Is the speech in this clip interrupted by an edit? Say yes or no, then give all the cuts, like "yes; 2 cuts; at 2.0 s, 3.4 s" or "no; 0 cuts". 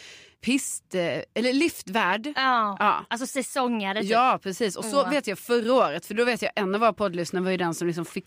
no; 0 cuts